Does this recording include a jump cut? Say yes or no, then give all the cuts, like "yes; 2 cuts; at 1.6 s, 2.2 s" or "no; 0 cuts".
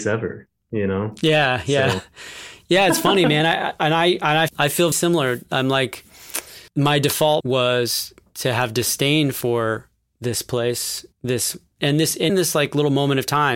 yes; 6 cuts; at 4.5 s, 4.9 s, 6.7 s, 7.4 s, 11.1 s, 12.3 s